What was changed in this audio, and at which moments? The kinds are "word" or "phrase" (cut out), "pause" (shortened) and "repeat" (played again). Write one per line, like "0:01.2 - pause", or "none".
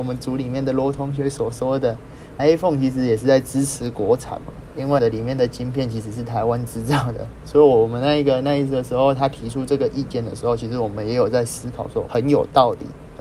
0:02.4 - word
0:05.0 - word
0:12.1 - word

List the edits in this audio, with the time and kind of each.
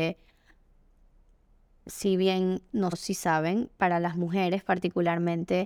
0:02.9 - word

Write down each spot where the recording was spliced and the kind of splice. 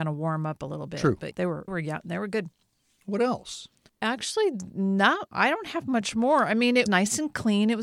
0:01.3 - word
0:01.7 - word
0:06.9 - word

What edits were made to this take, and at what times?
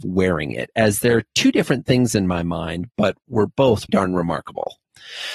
0:03.9 - word

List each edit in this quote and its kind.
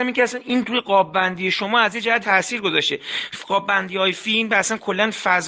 0:02.2 - word

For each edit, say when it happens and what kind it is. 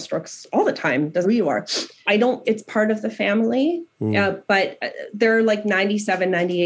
0:01.2 - word
0:02.1 - word
0:02.4 - word

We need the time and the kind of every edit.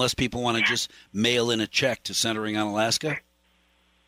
none

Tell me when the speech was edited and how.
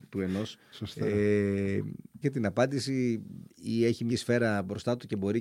0:02.2 - phrase
0:03.5 - pause
0:04.1 - word

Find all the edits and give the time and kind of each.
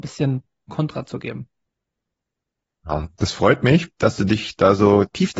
none

